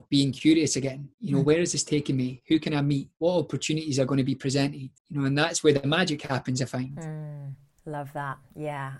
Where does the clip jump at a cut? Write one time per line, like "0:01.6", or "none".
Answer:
0:01.1
0:03.1
0:05.0